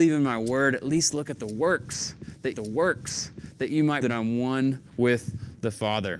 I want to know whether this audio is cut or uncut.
cut